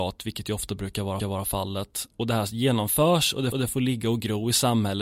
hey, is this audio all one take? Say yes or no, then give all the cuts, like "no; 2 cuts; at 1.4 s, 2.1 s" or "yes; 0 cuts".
no; 2 cuts; at 1.2 s, 3.5 s